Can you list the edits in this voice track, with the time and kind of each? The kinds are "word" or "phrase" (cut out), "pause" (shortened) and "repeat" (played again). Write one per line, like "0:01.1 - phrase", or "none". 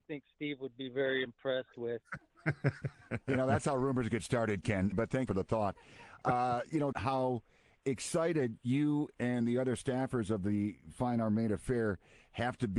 0:04.9 - word
0:05.3 - phrase
0:06.9 - phrase